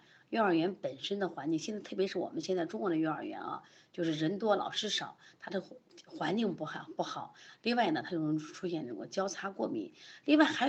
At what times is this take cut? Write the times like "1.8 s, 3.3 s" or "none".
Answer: none